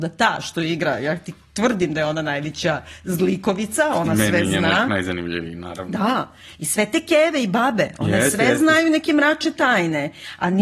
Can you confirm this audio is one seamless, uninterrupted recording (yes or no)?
yes